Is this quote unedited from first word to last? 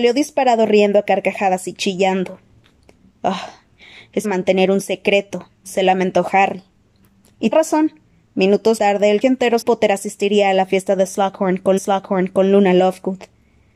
no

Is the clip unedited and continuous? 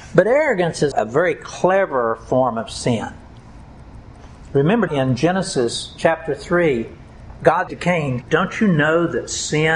no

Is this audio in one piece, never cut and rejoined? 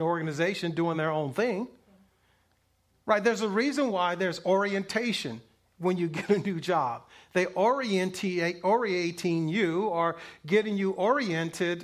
yes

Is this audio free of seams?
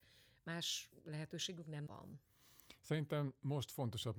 no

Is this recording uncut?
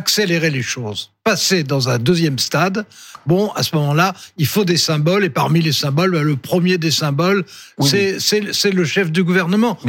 yes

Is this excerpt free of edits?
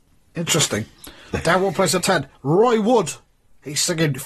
no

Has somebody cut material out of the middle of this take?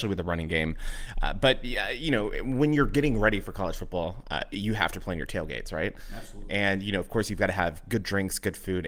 no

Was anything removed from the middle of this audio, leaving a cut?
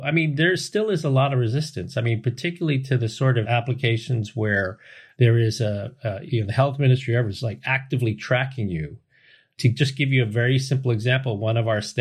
no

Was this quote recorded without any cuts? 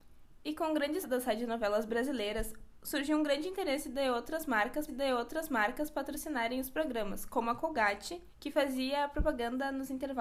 no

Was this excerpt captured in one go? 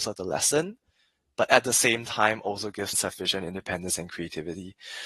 no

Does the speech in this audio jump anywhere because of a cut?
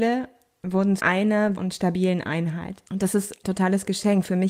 yes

